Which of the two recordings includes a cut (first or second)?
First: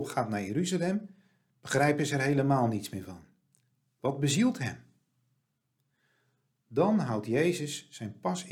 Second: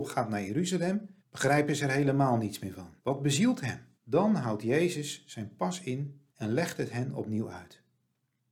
second